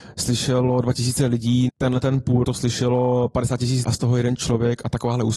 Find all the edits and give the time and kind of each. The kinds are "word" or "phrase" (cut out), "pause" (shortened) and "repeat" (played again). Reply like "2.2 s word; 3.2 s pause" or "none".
1.7 s word; 2.4 s word; 3.8 s word